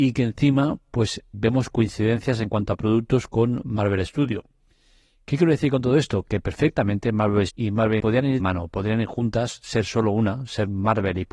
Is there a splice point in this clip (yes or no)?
yes